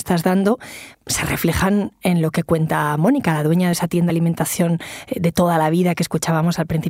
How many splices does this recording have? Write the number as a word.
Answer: three